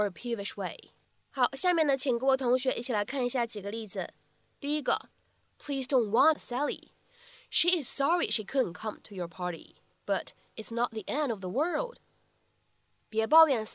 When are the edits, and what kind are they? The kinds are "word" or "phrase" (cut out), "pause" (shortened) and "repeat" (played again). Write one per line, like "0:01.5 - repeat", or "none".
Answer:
0:06.3 - phrase
0:09.9 - pause